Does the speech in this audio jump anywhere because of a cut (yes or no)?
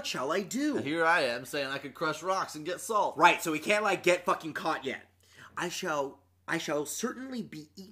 no